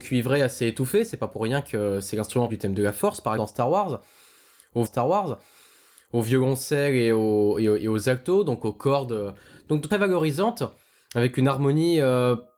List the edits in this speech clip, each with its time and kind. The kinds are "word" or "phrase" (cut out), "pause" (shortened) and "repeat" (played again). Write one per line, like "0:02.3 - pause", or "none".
0:02.5 - word
0:03.4 - word
0:04.9 - repeat
0:09.9 - phrase

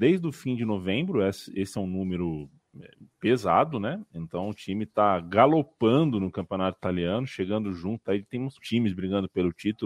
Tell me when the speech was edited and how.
0:03.0 - pause
0:08.6 - word

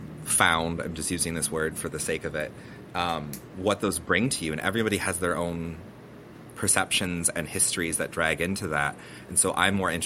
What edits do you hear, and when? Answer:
none

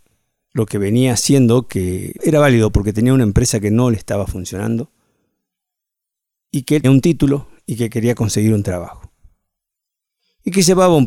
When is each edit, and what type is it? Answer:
0:02.2 - word
0:06.8 - word

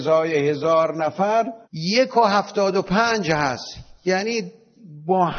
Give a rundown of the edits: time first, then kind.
0:01.6 - pause

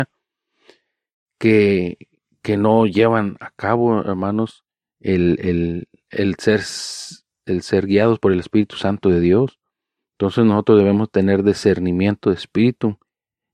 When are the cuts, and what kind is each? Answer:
none

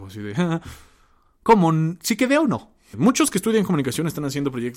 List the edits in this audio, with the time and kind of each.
none

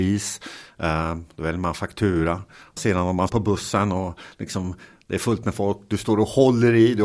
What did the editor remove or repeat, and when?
0:02.8 - word
0:03.3 - word

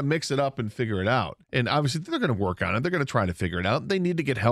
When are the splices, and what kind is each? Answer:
0:01.4 - pause

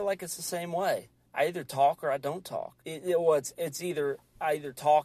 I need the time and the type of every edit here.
0:01.3 - pause
0:02.8 - pause

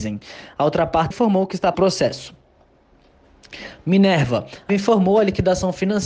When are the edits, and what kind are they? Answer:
0:01.1 - word
0:01.7 - phrase
0:04.7 - word

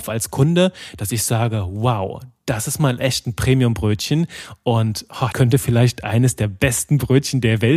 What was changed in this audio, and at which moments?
0:05.3 - word

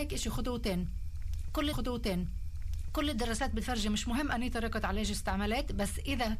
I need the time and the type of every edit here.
0:01.7 - repeat

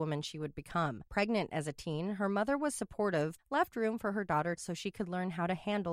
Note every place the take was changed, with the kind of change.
0:01.1 - pause
0:03.4 - word
0:04.6 - phrase

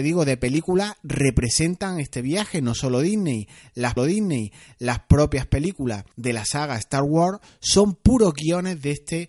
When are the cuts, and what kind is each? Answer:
0:04.0 - repeat
0:06.1 - pause

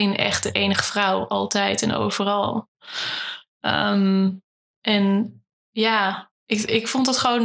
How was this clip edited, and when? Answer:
0:05.6 - word

